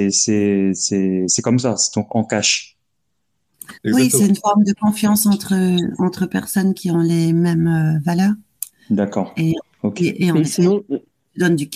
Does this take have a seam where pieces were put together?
yes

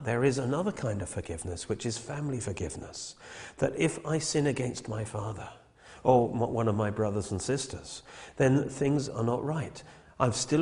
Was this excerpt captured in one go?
yes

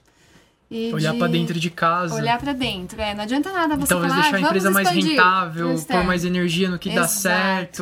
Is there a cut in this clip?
no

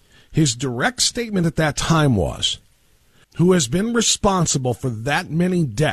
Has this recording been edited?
yes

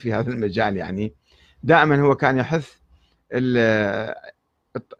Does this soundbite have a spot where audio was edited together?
no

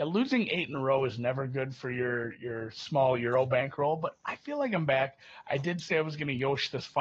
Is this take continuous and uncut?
yes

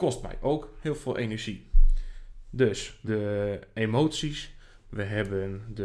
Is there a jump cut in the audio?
yes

